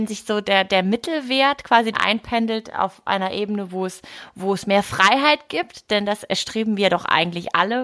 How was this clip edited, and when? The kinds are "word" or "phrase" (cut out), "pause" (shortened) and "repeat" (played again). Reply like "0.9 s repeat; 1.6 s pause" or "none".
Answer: 1.9 s word